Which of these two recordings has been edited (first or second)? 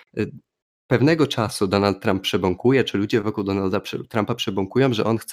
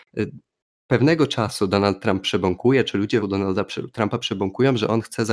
second